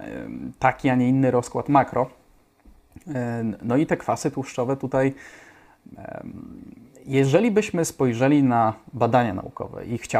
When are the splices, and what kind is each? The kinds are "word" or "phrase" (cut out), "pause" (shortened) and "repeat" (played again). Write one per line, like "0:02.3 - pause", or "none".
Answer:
none